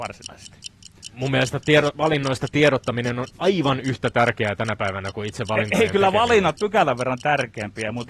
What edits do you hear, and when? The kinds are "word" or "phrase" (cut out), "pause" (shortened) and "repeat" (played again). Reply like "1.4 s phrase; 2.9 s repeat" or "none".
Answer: 6.6 s phrase